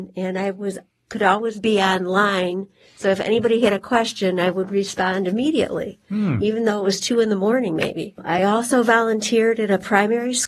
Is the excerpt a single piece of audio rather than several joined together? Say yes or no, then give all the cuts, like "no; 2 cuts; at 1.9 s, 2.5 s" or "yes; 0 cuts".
yes; 0 cuts